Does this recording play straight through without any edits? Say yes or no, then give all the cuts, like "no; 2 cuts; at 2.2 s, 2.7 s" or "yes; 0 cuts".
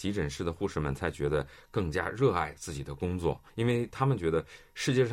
no; 1 cut; at 3.5 s